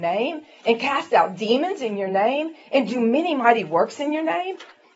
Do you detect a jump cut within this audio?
no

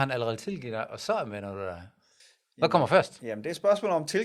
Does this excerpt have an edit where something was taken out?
yes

